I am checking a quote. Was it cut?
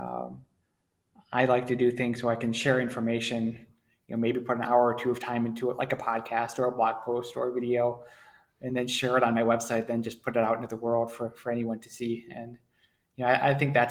no; 0 cuts

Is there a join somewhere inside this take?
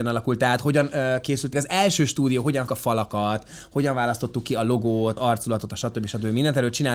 yes; 3 cuts; at 1.5 s, 2.7 s, 5.2 s

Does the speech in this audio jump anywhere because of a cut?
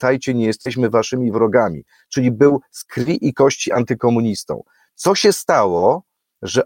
no; 0 cuts

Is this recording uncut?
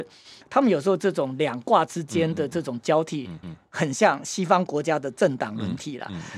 no; 1 cut; at 3.4 s

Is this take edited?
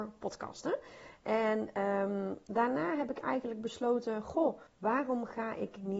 yes; 1 cut; at 4.7 s

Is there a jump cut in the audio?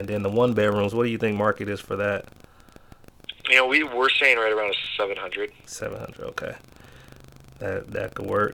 no; 0 cuts

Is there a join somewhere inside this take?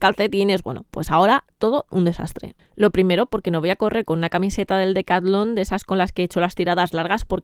no; 0 cuts

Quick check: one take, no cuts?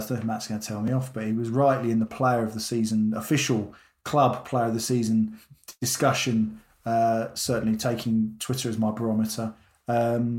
yes; 0 cuts

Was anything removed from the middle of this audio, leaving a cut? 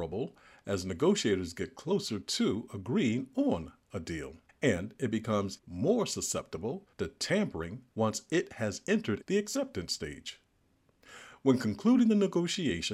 yes; 5 cuts; at 4.5 s, 5.6 s, 6.9 s, 7.9 s, 9.2 s

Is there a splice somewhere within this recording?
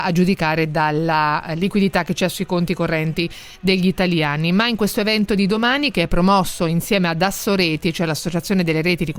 no; 0 cuts

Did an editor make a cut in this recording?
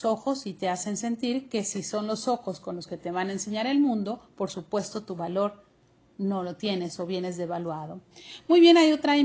no; 0 cuts

